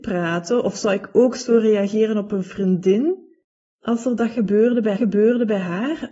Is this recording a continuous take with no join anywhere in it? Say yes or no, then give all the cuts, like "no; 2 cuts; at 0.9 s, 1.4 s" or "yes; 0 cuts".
no; 1 cut; at 5.0 s